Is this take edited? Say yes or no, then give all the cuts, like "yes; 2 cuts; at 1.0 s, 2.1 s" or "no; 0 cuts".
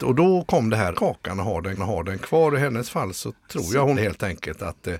yes; 4 cuts; at 0.9 s, 1.8 s, 3.4 s, 3.9 s